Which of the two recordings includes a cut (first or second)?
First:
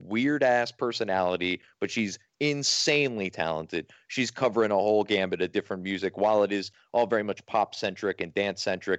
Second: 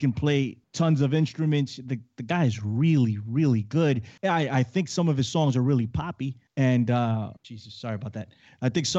second